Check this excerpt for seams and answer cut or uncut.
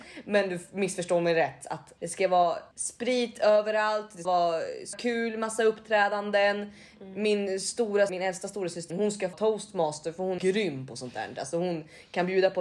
cut